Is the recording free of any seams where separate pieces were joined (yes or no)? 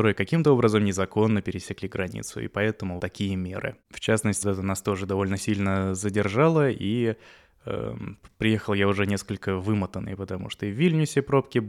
no